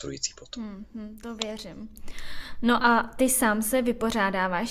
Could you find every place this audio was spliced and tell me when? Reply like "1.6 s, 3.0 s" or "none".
none